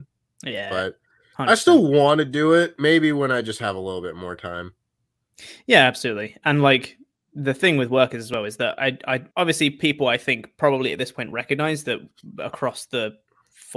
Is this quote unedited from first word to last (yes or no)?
no